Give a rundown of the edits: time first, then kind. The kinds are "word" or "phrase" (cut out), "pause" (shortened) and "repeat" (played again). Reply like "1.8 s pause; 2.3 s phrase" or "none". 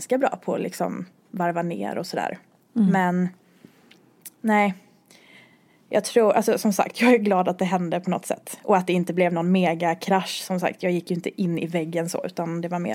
none